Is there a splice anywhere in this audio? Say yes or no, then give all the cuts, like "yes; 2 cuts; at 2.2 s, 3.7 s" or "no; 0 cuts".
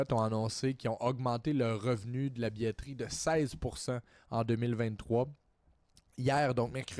no; 0 cuts